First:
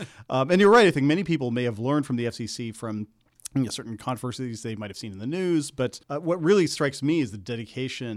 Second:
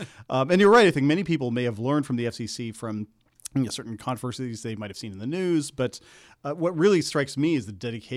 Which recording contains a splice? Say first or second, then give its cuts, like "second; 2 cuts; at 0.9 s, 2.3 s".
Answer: first; 1 cut; at 6.0 s